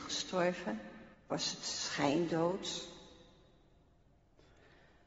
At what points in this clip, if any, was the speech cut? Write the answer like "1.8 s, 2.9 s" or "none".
1.1 s